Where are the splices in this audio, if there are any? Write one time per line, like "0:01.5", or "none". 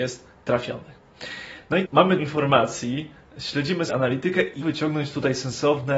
0:01.8
0:02.2
0:03.9
0:04.6